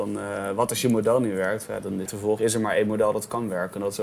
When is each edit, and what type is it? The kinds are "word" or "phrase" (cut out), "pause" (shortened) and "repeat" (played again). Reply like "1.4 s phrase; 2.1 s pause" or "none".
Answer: 2.1 s word; 2.4 s word